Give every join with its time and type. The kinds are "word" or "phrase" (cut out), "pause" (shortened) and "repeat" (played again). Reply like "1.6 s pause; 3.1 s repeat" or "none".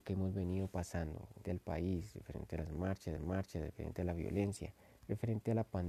1.4 s word; 3.2 s repeat; 4.8 s pause